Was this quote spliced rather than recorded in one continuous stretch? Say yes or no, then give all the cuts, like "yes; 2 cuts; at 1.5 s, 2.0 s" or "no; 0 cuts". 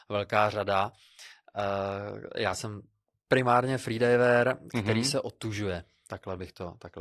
no; 0 cuts